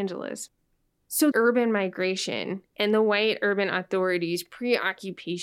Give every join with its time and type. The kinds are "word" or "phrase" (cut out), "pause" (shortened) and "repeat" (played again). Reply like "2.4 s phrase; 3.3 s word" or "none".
1.3 s word